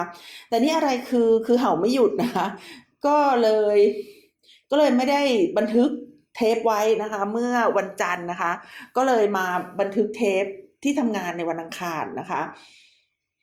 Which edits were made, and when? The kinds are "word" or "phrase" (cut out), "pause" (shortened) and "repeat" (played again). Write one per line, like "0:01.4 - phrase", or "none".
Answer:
none